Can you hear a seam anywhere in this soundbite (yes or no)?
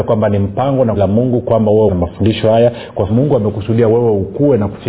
yes